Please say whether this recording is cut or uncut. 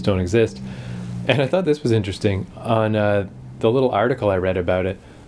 uncut